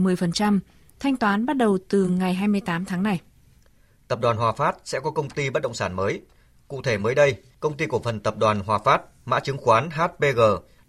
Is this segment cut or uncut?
uncut